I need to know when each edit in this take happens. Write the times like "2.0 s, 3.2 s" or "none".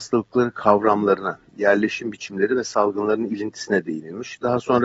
none